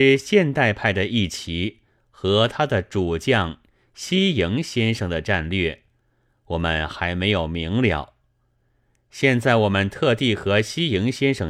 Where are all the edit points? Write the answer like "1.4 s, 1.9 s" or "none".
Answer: none

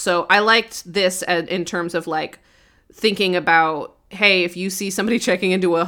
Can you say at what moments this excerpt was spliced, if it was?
none

